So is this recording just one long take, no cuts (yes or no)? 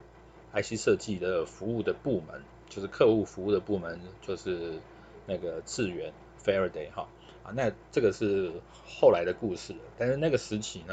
no